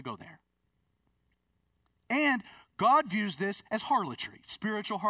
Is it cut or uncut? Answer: uncut